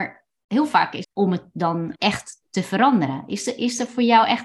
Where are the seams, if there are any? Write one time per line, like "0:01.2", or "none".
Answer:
0:01.0
0:02.0